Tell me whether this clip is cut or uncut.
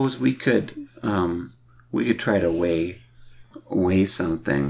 uncut